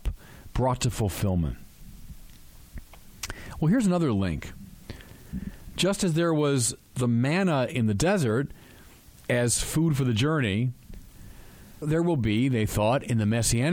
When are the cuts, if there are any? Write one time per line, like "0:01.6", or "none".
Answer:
0:11.8